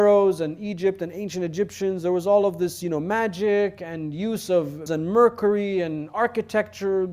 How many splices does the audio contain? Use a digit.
1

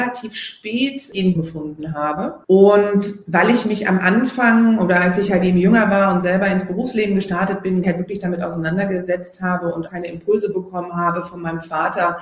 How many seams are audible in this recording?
2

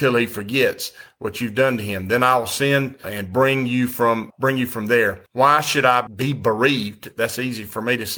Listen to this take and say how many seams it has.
1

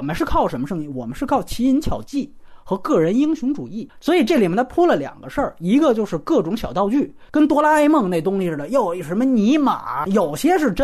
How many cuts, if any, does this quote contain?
1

